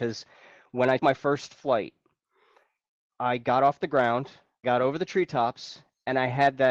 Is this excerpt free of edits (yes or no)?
no